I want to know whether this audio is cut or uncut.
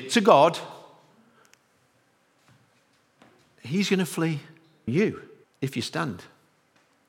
cut